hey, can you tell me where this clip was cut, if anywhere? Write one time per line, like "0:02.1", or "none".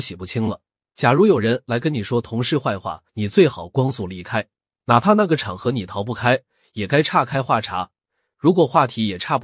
0:03.1